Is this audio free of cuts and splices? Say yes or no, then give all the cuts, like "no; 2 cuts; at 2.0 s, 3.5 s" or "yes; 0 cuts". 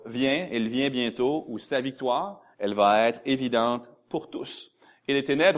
no; 1 cut; at 2.5 s